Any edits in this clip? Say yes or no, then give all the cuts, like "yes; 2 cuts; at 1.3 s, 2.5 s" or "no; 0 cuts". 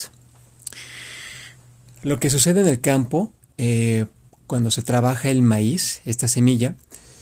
no; 0 cuts